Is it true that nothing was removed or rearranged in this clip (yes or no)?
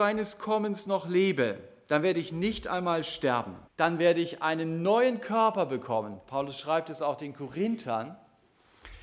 no